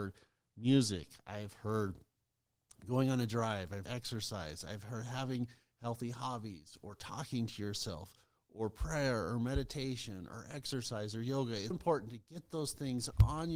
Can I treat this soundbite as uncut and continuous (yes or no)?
no